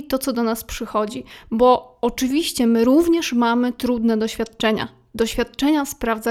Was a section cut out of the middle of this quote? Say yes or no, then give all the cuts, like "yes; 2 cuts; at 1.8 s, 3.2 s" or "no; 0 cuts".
no; 0 cuts